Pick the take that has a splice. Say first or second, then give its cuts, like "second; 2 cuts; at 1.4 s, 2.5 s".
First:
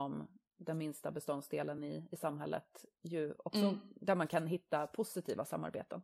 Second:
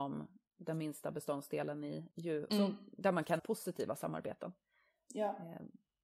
second; 3 cuts; at 2.1 s, 2.5 s, 3.4 s